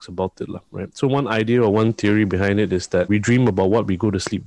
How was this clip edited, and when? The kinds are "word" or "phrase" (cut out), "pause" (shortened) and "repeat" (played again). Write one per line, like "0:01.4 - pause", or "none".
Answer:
none